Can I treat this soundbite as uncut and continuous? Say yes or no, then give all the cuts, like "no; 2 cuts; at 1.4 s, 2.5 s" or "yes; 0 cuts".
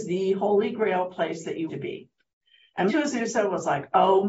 no; 2 cuts; at 1.7 s, 2.9 s